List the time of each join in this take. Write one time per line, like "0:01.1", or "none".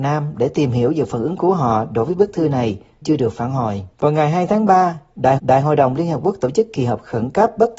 0:03.0
0:03.9
0:05.4